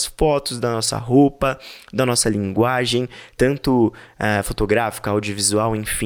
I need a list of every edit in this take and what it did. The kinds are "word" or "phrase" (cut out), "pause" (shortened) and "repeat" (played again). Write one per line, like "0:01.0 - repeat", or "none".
none